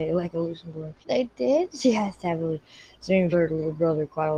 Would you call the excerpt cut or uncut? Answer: cut